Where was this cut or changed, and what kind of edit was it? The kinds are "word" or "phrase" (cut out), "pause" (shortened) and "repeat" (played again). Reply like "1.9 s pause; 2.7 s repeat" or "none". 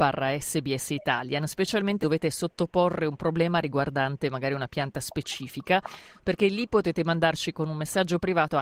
2.0 s word